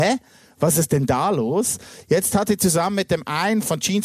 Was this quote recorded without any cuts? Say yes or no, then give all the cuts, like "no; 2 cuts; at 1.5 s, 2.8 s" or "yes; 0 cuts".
yes; 0 cuts